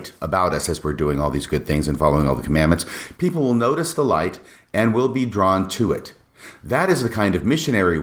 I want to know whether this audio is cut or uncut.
uncut